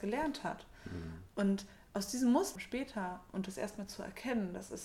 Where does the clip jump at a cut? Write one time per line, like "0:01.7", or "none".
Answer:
0:02.6